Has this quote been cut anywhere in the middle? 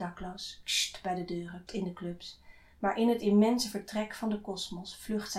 yes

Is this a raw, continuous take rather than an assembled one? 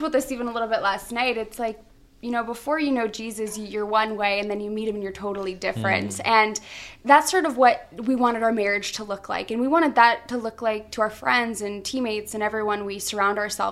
yes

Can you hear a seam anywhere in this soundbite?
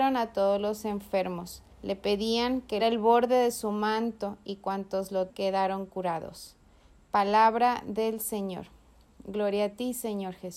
yes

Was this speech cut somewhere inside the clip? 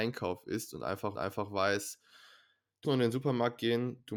yes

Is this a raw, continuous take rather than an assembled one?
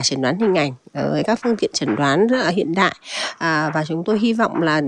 yes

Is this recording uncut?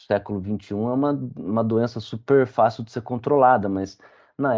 yes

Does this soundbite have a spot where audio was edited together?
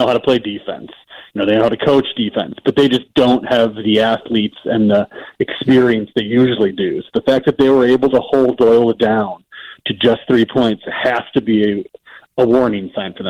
no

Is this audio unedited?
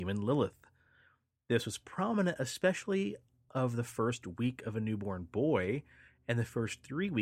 yes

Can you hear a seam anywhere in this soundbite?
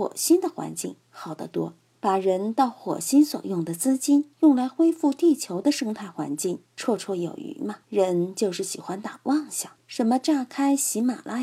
yes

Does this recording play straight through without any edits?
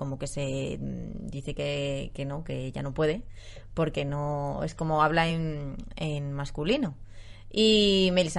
yes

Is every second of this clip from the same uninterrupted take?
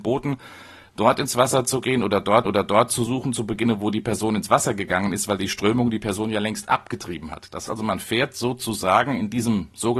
no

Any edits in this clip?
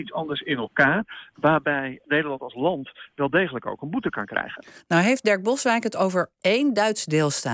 no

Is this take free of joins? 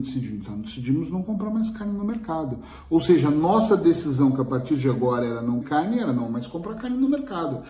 no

